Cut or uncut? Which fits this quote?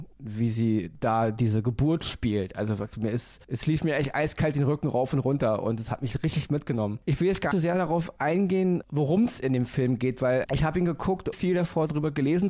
cut